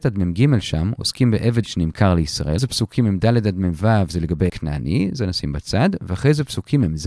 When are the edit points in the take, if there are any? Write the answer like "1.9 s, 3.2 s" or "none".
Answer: 1.6 s, 2.6 s, 4.5 s

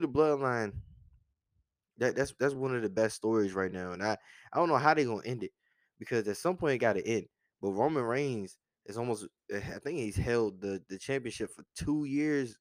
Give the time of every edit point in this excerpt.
none

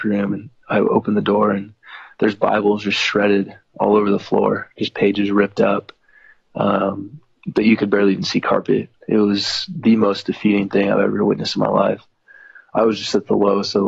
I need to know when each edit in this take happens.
none

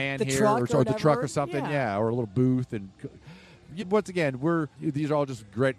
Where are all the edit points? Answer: 3.8 s, 4.7 s

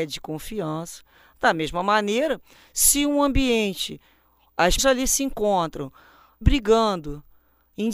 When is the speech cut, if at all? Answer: 4.8 s, 6.4 s

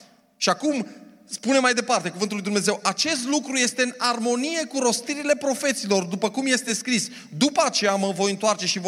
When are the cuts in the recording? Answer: none

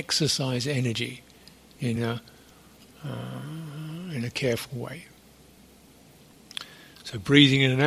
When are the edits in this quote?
none

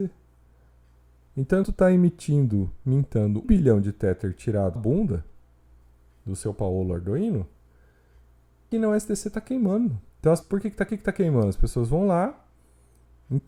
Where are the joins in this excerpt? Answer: 1.6 s, 3.4 s, 4.8 s, 8.7 s, 10.1 s, 10.4 s, 10.9 s

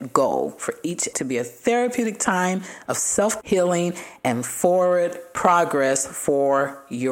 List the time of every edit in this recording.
1.1 s, 3.4 s

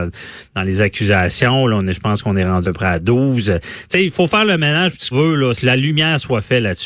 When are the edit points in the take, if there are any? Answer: 2.6 s, 4.1 s, 5.1 s, 5.5 s

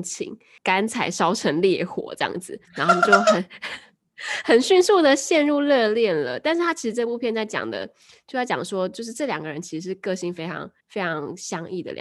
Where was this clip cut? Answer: 2.6 s, 10.8 s

